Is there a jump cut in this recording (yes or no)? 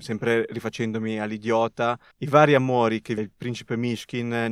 yes